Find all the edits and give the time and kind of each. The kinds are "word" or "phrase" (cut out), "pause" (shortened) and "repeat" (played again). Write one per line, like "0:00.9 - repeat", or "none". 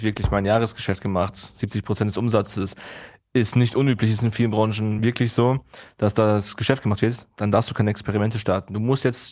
none

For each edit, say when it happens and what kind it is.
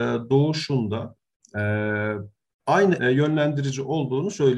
0:01.4 - pause
0:03.0 - word

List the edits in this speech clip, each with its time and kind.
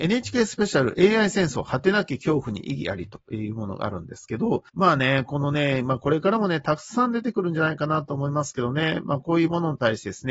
0:04.7 - pause

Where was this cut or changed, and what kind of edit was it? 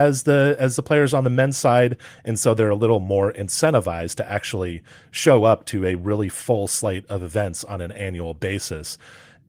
none

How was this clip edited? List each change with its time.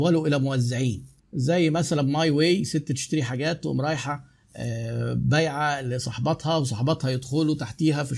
0:01.2 - pause

